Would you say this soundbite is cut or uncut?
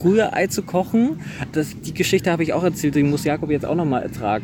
cut